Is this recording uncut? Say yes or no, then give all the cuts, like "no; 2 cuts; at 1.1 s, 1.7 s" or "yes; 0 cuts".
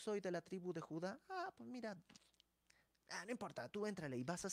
yes; 0 cuts